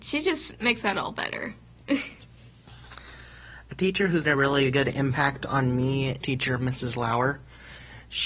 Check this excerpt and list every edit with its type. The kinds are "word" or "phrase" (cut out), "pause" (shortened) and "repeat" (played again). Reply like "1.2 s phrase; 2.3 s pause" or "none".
4.2 s word; 6.2 s phrase